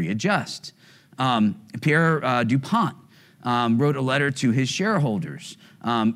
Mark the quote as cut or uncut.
uncut